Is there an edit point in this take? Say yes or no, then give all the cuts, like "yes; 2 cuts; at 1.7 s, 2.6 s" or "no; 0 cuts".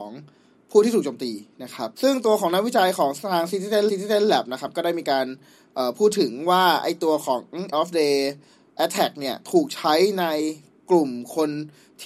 yes; 3 cuts; at 1.9 s, 3.9 s, 7.7 s